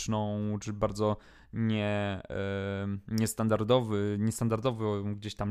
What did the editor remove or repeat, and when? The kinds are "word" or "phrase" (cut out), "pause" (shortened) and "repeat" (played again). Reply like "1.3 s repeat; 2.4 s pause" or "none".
none